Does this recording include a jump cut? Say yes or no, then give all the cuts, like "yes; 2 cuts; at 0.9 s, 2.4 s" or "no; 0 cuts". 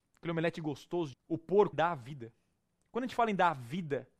yes; 2 cuts; at 1.1 s, 1.7 s